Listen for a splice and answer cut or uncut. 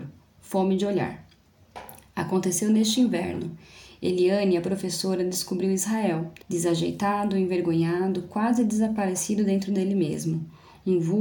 cut